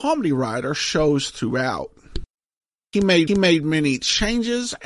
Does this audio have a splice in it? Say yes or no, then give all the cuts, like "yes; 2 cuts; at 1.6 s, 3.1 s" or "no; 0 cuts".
yes; 1 cut; at 3.3 s